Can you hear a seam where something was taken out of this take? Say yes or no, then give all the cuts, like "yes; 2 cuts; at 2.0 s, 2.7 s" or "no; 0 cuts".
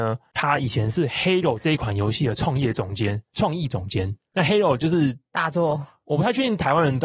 no; 0 cuts